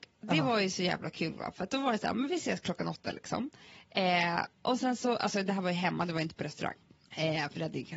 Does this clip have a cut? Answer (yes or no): no